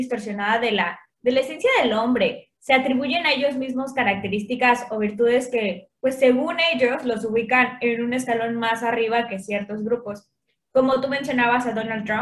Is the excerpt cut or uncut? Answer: uncut